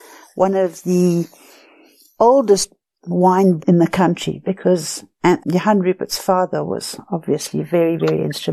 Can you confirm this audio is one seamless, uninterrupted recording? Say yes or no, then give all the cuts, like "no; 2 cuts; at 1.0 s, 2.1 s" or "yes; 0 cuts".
no; 2 cuts; at 3.6 s, 5.4 s